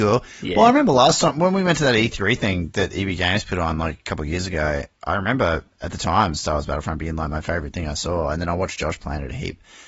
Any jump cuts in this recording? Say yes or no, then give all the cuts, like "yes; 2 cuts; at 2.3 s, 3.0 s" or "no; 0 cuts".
yes; 1 cut; at 5.7 s